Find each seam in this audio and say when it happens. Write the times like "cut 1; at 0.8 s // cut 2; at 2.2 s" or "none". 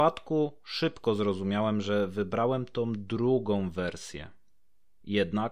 none